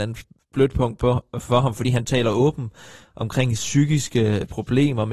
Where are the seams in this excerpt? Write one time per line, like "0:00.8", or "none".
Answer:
none